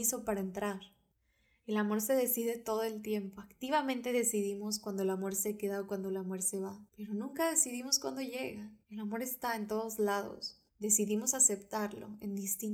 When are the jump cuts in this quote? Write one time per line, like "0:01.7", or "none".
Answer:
0:01.1
0:06.9
0:08.8
0:10.7